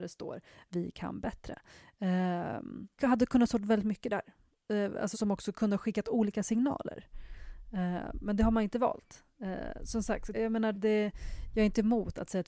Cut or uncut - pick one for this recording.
cut